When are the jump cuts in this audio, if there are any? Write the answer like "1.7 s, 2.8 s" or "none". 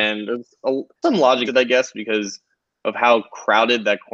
1.0 s, 1.5 s